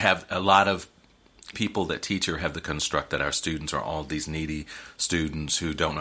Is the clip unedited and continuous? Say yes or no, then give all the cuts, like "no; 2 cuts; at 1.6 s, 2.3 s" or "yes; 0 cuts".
no; 1 cut; at 1.5 s